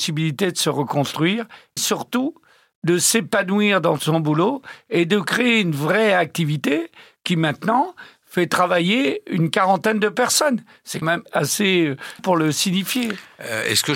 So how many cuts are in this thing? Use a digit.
4